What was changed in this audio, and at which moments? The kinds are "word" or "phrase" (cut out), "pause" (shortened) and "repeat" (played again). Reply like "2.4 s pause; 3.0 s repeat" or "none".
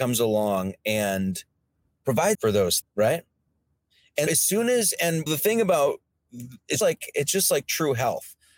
2.3 s word; 2.8 s word; 4.3 s word; 5.3 s word; 6.8 s word